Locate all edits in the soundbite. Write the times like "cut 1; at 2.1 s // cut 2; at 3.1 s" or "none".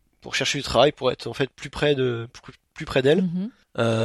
none